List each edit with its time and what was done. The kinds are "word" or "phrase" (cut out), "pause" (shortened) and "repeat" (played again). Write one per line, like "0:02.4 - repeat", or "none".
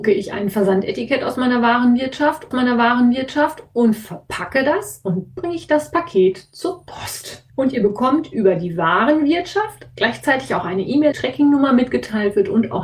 0:02.5 - repeat
0:05.4 - word
0:07.5 - pause
0:11.1 - phrase